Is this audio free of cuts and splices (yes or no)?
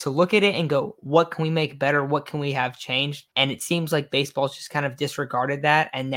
no